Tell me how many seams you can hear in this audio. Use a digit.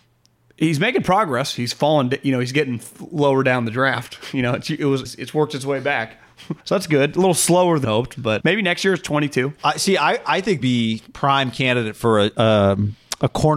6